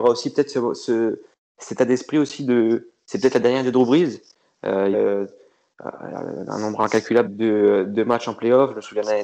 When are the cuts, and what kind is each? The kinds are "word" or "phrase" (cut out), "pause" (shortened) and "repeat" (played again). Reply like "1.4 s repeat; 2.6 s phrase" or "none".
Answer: 4.9 s phrase; 7.2 s word